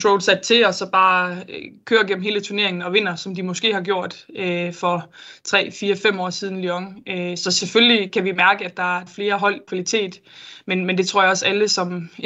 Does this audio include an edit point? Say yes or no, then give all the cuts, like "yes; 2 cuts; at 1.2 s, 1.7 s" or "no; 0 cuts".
yes; 3 cuts; at 8.1 s, 9.1 s, 9.7 s